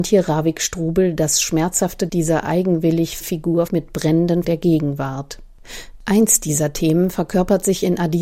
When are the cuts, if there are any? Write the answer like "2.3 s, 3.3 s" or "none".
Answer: 2.1 s, 3.2 s, 3.7 s, 4.4 s